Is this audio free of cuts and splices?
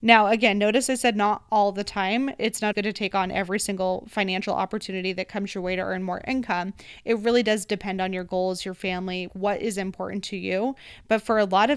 no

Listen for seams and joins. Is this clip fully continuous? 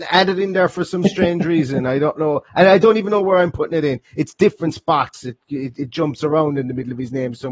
yes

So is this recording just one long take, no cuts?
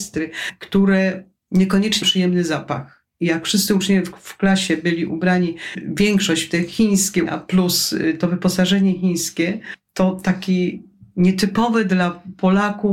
no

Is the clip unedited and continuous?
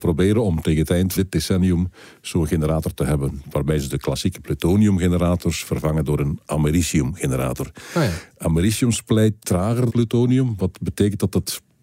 no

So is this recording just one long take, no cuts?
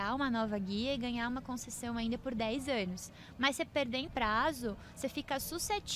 no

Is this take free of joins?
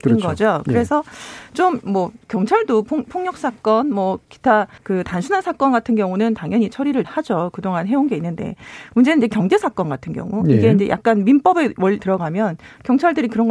no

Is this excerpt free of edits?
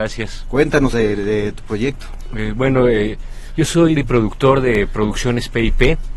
no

